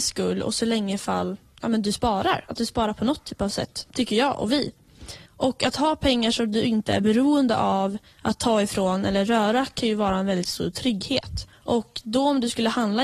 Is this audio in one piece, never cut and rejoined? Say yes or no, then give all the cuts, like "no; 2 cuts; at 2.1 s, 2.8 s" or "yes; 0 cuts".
no; 2 cuts; at 5.3 s, 11.5 s